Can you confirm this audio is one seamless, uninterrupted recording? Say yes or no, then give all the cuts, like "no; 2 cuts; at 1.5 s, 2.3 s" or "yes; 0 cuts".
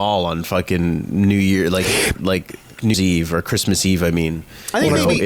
no; 2 cuts; at 2.2 s, 2.9 s